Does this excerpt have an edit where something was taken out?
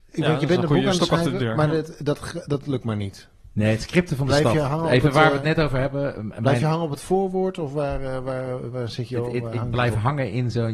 no; 0 cuts

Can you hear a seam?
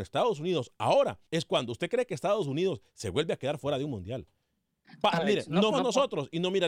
yes; 2 cuts; at 1.3 s, 5.7 s

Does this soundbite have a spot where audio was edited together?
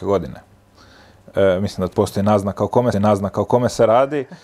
yes; 2 cuts; at 1.9 s, 2.9 s

